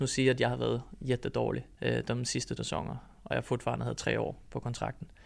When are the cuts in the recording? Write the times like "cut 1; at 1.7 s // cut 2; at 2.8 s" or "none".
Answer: cut 1; at 1.7 s // cut 2; at 2.6 s